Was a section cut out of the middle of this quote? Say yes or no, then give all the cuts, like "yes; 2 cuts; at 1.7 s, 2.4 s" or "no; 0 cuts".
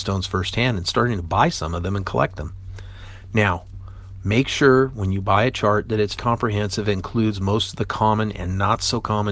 yes; 1 cut; at 6.2 s